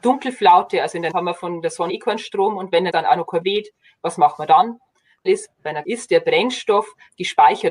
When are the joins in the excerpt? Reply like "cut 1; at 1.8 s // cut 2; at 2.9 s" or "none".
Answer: cut 1; at 1.1 s // cut 2; at 1.9 s // cut 3; at 2.9 s // cut 4; at 3.4 s // cut 5; at 5.3 s // cut 6; at 5.8 s